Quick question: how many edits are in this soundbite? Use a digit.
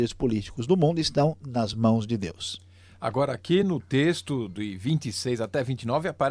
0